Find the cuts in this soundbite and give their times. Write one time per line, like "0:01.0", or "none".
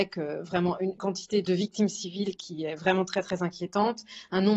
none